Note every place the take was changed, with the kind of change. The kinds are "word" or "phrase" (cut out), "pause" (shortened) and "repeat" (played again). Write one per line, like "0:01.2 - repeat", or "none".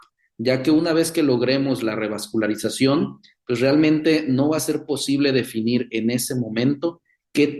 none